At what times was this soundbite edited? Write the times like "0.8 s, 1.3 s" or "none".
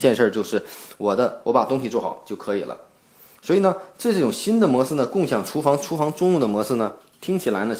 none